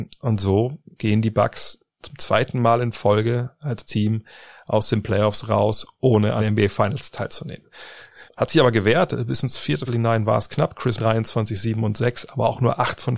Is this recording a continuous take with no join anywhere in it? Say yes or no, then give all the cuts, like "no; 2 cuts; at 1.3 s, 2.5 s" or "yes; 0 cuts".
no; 6 cuts; at 1.9 s, 3.9 s, 6.4 s, 8.3 s, 9.9 s, 11.0 s